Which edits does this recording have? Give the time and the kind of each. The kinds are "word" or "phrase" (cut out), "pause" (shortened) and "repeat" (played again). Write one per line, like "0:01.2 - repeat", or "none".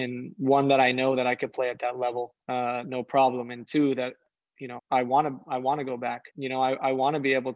0:02.4 - pause
0:04.8 - word
0:06.3 - pause